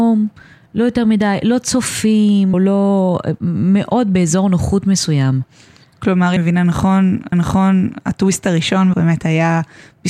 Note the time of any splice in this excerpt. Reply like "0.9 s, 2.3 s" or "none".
2.5 s, 6.4 s, 7.3 s, 8.9 s